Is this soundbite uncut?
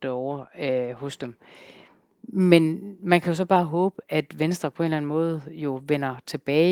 yes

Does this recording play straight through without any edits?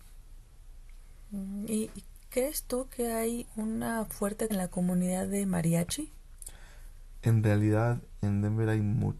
no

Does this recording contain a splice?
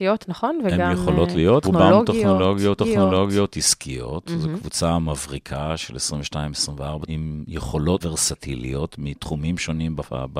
yes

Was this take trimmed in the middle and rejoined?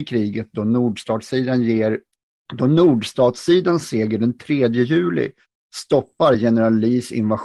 no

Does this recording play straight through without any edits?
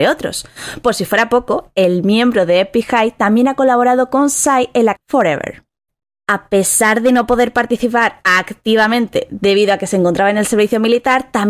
no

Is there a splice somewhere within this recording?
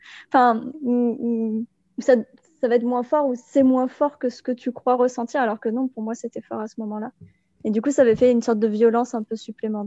no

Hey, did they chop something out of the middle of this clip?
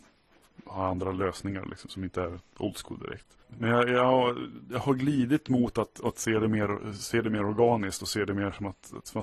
no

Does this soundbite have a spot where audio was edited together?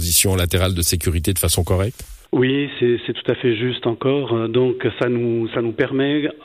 yes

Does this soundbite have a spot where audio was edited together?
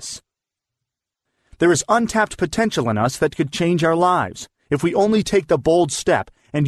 no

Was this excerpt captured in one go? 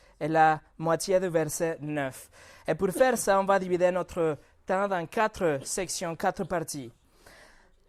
yes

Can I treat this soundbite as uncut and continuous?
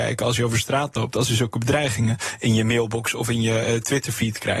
yes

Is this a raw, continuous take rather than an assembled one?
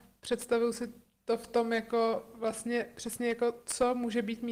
yes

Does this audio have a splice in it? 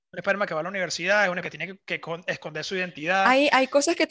yes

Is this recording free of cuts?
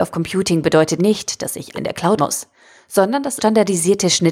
no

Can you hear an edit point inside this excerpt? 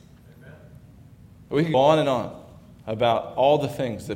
yes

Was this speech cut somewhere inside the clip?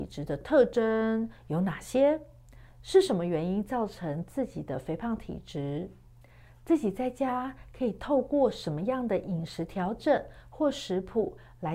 no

